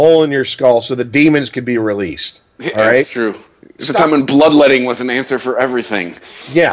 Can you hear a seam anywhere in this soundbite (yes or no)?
no